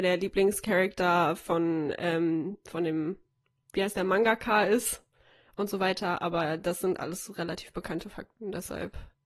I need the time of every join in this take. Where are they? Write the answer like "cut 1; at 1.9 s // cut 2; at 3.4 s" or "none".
none